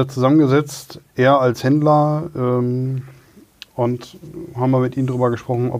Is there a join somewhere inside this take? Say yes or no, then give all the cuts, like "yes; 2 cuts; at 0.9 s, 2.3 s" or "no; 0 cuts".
no; 0 cuts